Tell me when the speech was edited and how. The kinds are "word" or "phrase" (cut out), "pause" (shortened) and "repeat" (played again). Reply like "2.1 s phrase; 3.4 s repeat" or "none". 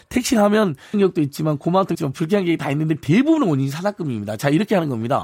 0.9 s word; 1.9 s word; 3.0 s word

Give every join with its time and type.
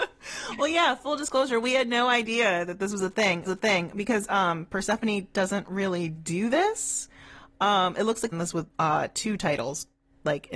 3.5 s repeat; 8.3 s phrase; 8.7 s pause

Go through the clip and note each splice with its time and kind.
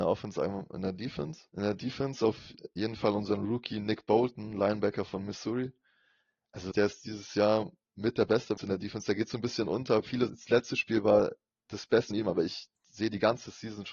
1.5 s pause; 6.7 s word; 8.6 s word; 10.3 s word; 12.1 s word

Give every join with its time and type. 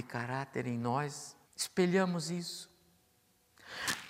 1.5 s pause

